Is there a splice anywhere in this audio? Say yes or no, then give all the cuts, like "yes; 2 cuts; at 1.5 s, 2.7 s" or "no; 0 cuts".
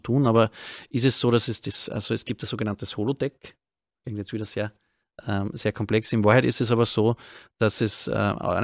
no; 0 cuts